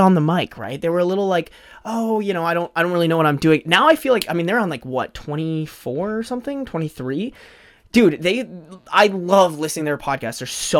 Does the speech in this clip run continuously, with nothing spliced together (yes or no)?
yes